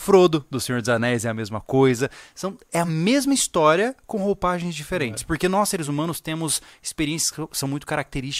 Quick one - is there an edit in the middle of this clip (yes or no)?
no